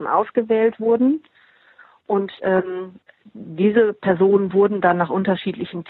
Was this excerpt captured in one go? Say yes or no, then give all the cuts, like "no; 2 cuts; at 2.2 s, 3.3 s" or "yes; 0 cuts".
yes; 0 cuts